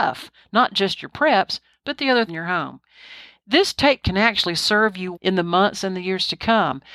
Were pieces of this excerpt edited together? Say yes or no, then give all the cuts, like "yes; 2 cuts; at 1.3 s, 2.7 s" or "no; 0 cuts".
yes; 3 cuts; at 2.3 s, 4.0 s, 5.1 s